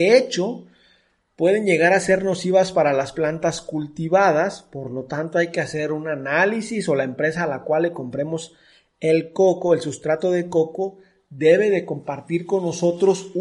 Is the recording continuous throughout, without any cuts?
yes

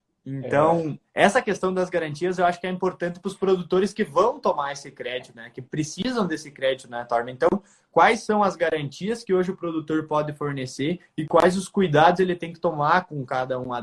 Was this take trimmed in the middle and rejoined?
no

